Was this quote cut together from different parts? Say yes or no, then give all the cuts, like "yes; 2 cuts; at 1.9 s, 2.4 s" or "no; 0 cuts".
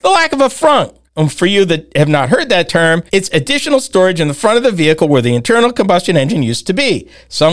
yes; 2 cuts; at 1.1 s, 3.1 s